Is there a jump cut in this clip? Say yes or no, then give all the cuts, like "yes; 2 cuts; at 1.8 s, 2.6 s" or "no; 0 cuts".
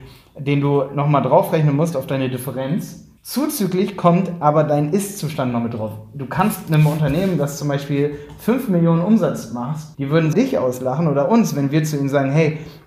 yes; 3 cuts; at 3.2 s, 9.9 s, 10.3 s